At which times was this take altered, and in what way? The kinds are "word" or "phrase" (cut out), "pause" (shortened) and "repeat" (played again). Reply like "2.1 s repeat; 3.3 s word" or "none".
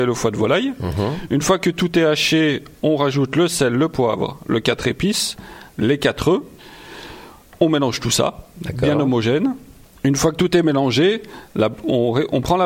none

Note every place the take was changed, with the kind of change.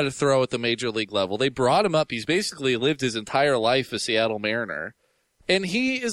none

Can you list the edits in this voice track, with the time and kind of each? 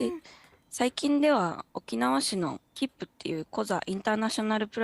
2.7 s pause

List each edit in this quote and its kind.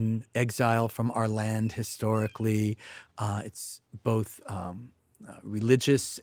none

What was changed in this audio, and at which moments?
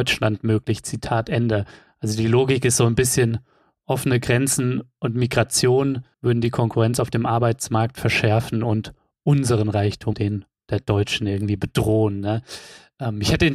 6.1 s pause; 10.1 s word

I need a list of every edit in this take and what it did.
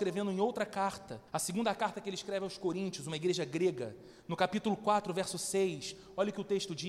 1.3 s pause

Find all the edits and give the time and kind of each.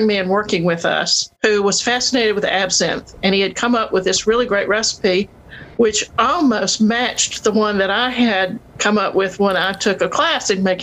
1.3 s pause; 5.7 s pause

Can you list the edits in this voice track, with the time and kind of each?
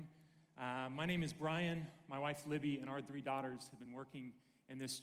none

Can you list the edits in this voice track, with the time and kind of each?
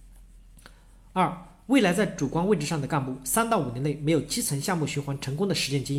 none

